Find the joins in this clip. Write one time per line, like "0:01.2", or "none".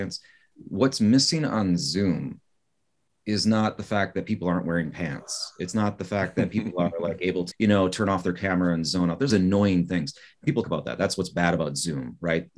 0:07.5
0:09.3
0:10.6